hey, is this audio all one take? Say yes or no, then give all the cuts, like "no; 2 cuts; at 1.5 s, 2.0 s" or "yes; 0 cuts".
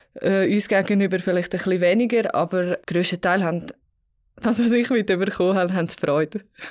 no; 1 cut; at 2.8 s